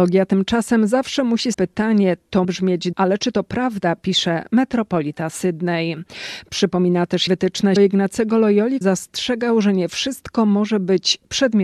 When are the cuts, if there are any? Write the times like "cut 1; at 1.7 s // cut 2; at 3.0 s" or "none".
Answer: cut 1; at 1.5 s // cut 2; at 2.4 s // cut 3; at 2.9 s // cut 4; at 7.3 s // cut 5; at 7.8 s // cut 6; at 8.8 s